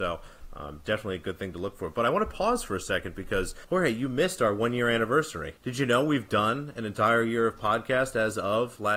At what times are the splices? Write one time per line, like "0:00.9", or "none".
0:03.6
0:05.6